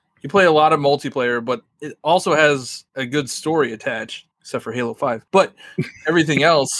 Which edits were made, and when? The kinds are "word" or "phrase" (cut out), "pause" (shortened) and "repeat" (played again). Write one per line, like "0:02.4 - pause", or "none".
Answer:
0:02.9 - pause
0:04.3 - pause
0:05.3 - pause